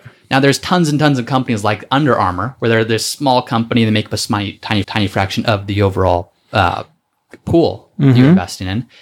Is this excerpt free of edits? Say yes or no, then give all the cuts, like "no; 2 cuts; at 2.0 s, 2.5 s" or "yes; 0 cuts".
no; 1 cut; at 4.8 s